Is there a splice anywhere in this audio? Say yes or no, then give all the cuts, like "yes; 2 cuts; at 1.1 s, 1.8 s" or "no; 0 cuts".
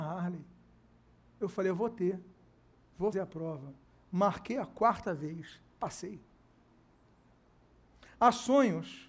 yes; 1 cut; at 3.1 s